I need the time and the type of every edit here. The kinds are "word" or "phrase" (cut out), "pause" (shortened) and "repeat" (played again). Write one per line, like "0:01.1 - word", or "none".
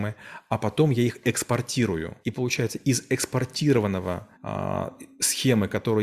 0:02.2 - pause
0:04.3 - pause